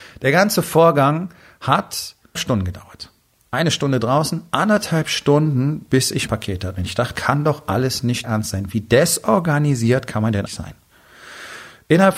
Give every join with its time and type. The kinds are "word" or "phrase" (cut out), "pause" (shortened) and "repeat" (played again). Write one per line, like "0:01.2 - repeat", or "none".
0:02.3 - word
0:06.3 - word
0:07.1 - word
0:08.2 - word
0:10.5 - word